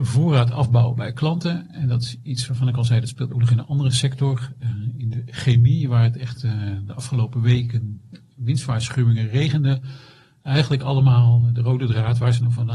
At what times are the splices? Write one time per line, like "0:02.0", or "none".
none